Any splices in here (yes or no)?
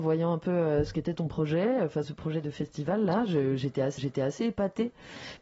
yes